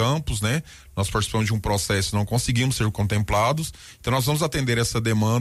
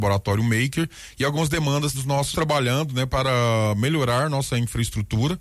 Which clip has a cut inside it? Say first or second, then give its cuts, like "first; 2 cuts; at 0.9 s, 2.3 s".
second; 2 cuts; at 1.9 s, 2.3 s